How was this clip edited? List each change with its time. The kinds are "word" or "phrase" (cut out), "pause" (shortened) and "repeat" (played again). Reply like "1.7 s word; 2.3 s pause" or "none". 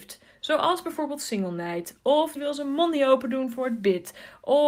2.4 s word